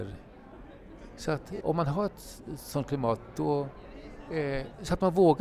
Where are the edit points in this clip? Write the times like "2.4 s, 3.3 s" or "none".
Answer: 1.6 s